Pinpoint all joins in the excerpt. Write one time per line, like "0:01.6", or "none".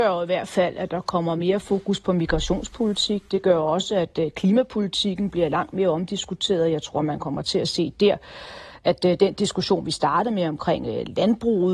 none